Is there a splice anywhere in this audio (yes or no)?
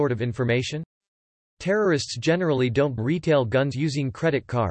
yes